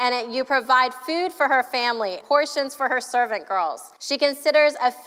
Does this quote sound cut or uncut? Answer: cut